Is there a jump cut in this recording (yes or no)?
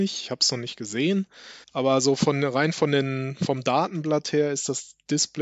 yes